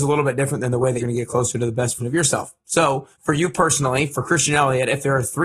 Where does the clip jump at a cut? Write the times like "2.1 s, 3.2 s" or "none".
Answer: 1.0 s, 2.0 s, 3.1 s